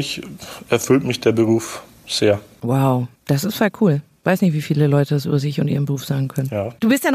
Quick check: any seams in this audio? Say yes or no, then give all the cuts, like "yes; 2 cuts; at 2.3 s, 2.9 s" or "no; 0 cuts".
yes; 1 cut; at 3.2 s